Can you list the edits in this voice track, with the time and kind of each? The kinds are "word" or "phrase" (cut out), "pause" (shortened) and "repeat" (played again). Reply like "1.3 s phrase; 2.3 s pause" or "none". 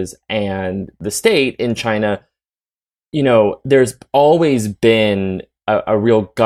none